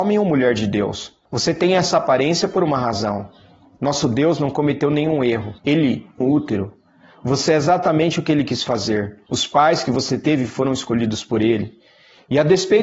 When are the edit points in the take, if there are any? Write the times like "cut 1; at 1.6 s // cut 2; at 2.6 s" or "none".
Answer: cut 1; at 1.3 s // cut 2; at 5.6 s // cut 3; at 6.2 s // cut 4; at 9.3 s

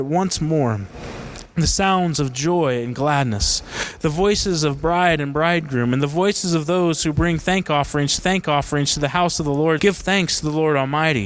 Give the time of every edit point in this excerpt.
cut 1; at 8.2 s // cut 2; at 9.8 s

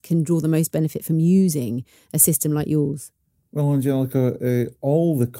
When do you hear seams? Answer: none

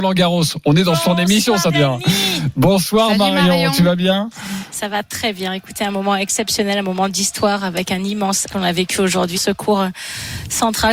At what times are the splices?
cut 1; at 1.7 s // cut 2; at 8.5 s // cut 3; at 9.3 s

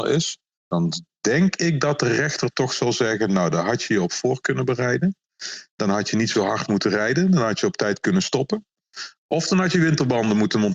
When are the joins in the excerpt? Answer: none

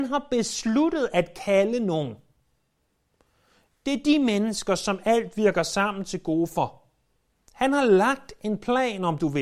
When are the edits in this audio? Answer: none

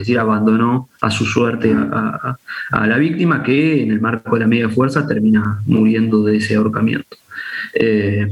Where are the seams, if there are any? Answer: none

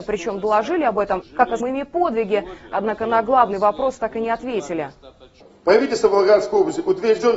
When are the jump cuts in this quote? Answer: cut 1; at 1.6 s

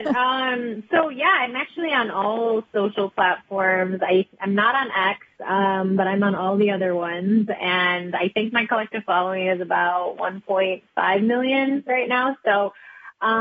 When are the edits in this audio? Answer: none

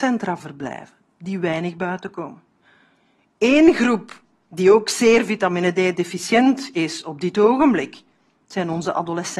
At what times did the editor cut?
none

